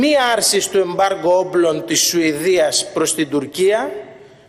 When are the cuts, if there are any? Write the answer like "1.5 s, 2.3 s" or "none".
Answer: none